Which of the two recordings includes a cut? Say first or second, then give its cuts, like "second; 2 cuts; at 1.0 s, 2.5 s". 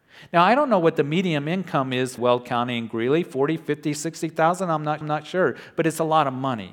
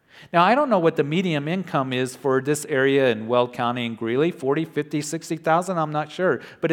first; 2 cuts; at 2.2 s, 5.0 s